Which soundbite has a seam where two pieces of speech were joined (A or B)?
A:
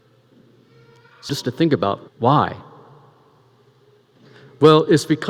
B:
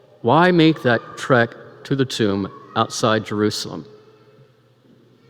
A